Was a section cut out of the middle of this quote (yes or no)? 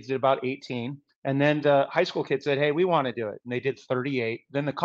yes